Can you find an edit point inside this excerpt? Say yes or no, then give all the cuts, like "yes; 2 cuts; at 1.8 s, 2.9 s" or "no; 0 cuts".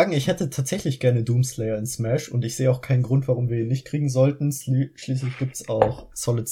no; 0 cuts